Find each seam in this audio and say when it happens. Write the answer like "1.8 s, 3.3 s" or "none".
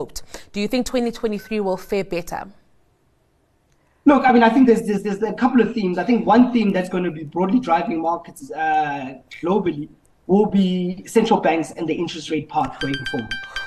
none